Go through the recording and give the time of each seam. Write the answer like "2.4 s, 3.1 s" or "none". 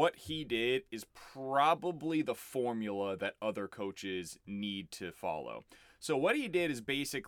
none

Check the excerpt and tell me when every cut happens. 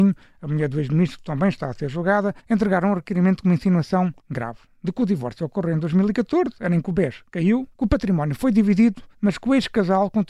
2.4 s, 4.2 s, 7.7 s, 9.1 s

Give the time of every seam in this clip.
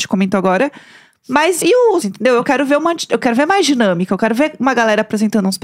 1.6 s, 2.0 s

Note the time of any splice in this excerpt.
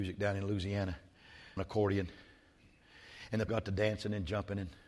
1.6 s, 3.5 s

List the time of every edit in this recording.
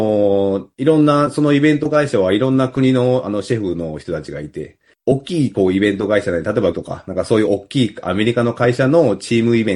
6.7 s

